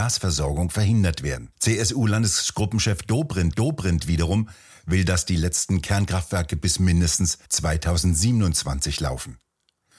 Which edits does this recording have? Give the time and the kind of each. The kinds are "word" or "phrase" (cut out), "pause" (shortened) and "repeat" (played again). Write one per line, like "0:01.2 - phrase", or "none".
0:01.5 - pause
0:03.5 - repeat
0:07.5 - pause